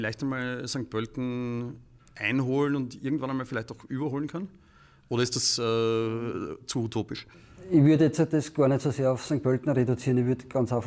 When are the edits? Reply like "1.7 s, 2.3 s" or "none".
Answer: none